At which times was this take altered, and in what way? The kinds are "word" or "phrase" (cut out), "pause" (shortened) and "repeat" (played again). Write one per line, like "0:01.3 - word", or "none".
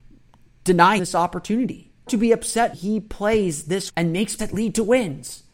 0:01.0 - word
0:02.1 - word
0:02.7 - word
0:03.9 - word
0:04.4 - word